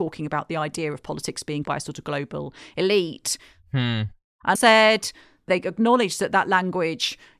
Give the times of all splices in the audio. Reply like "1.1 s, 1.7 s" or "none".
1.6 s, 4.6 s